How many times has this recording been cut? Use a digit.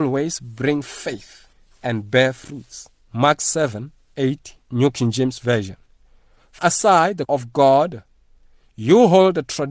5